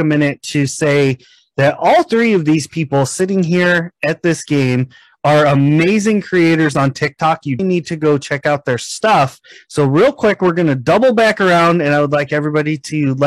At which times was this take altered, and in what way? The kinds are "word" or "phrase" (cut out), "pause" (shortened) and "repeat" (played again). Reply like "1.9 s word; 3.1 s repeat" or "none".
7.6 s word